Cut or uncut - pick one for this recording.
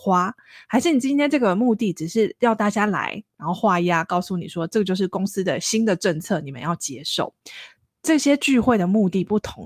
uncut